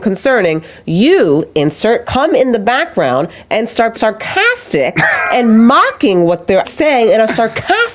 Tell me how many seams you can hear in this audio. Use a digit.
2